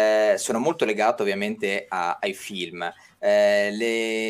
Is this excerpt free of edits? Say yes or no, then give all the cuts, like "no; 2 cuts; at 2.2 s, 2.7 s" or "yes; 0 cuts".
yes; 0 cuts